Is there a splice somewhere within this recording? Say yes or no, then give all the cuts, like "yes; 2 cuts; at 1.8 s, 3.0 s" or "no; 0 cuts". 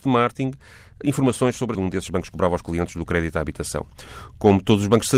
yes; 2 cuts; at 1.0 s, 1.7 s